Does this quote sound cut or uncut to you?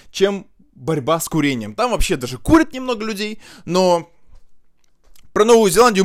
uncut